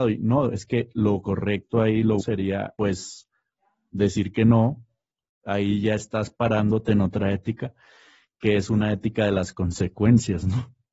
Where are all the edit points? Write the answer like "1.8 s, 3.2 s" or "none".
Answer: 2.2 s